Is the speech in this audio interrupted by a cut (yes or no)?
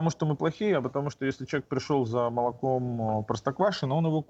no